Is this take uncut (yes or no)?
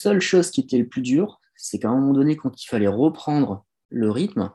yes